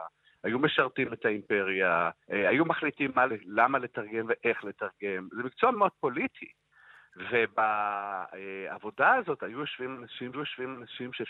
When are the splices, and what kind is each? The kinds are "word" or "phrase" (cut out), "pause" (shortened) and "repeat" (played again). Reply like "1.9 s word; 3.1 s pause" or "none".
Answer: 2.2 s pause; 3.3 s word; 5.7 s word; 10.3 s repeat